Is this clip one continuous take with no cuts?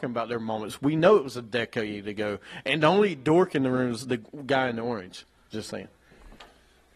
yes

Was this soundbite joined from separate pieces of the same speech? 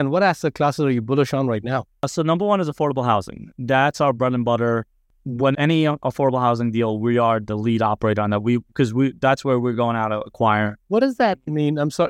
yes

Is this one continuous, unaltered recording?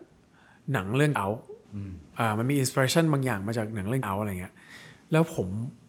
no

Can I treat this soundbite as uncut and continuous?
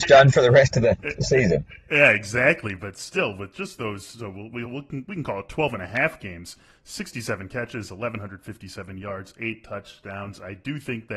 yes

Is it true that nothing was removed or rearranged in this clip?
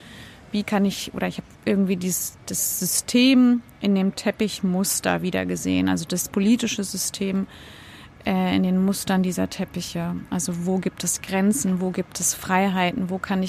no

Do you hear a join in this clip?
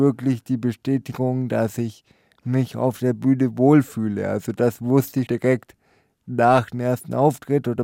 yes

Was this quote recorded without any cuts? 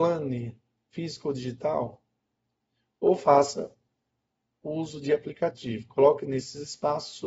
yes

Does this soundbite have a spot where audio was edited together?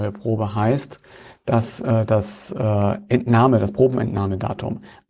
no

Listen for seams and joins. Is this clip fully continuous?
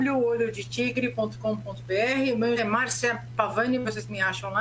no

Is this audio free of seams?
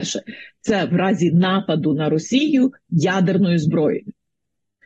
yes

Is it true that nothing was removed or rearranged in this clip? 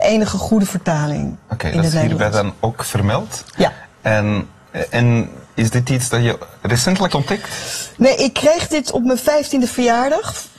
no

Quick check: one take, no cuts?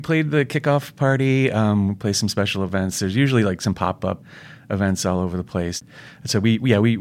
yes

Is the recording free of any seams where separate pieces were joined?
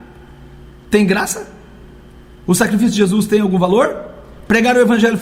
yes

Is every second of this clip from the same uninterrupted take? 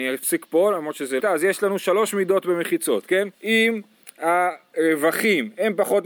no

